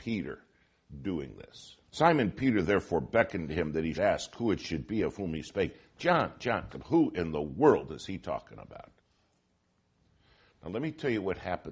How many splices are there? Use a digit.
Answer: 3